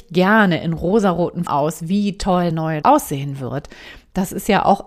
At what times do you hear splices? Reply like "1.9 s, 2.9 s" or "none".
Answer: 1.5 s, 2.5 s, 2.8 s

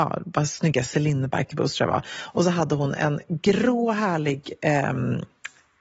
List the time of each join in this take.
none

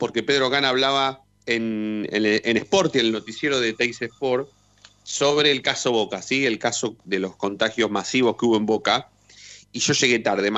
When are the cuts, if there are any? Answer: 1.4 s

